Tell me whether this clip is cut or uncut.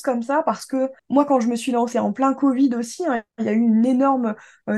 cut